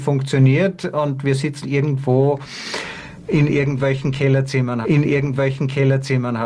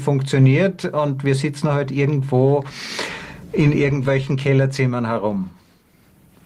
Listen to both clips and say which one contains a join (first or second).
first